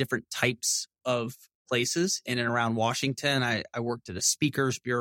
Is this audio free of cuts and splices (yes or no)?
yes